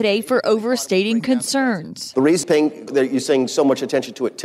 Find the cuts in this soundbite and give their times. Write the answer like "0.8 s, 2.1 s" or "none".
2.4 s, 2.9 s

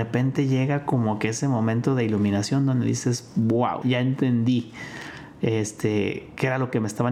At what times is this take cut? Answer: 3.8 s

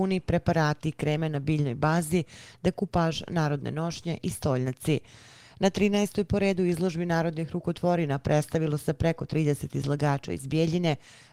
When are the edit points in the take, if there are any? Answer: none

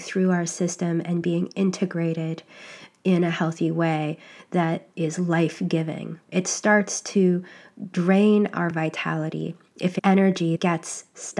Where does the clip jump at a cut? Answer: none

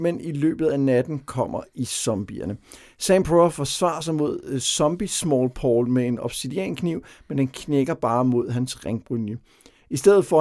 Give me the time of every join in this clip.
none

